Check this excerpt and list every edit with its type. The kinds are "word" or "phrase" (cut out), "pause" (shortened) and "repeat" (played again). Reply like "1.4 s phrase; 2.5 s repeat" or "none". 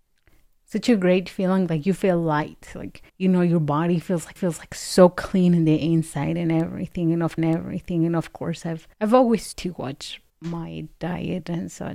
3.1 s pause; 4.4 s repeat; 7.4 s repeat; 8.9 s pause; 9.5 s word; 10.3 s pause